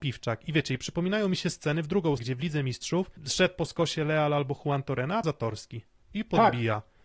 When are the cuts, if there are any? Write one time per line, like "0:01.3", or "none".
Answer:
0:02.2
0:03.2
0:05.2
0:06.0